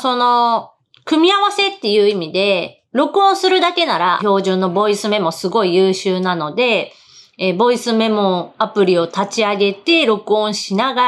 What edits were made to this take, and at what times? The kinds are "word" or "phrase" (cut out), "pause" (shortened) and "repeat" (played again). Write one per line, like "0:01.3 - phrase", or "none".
0:04.2 - word